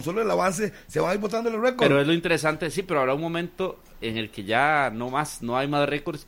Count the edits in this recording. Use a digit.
1